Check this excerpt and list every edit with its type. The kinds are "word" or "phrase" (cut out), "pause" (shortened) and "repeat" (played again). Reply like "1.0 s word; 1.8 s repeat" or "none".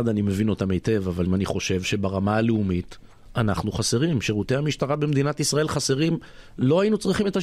1.3 s word